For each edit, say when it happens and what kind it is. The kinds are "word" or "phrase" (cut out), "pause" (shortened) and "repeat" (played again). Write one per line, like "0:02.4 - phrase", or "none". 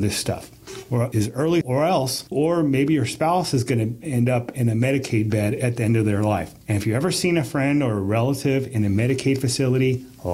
0:01.6 - phrase
0:02.3 - word